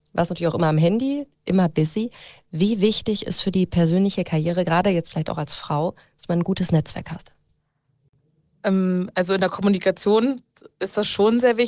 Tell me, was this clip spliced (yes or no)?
no